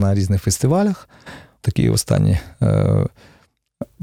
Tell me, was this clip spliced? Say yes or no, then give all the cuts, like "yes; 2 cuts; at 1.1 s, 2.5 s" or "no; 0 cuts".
yes; 1 cut; at 1.6 s